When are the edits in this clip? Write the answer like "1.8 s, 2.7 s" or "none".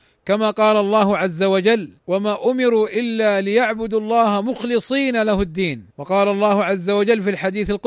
2.0 s, 5.9 s